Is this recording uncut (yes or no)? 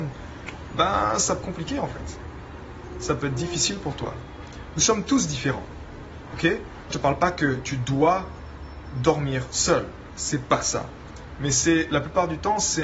no